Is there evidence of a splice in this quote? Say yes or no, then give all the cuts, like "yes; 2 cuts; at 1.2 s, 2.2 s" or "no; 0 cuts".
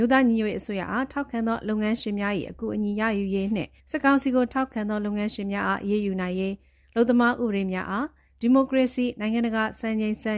yes; 1 cut; at 3.8 s